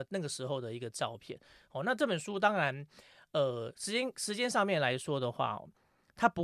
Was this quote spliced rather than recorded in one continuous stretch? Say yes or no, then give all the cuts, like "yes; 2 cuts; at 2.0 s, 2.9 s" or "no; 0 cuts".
no; 0 cuts